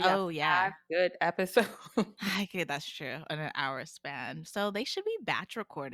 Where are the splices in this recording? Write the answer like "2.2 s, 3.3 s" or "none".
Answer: none